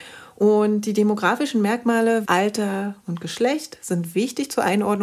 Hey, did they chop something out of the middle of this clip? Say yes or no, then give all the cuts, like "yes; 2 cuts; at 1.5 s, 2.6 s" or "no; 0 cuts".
yes; 1 cut; at 2.2 s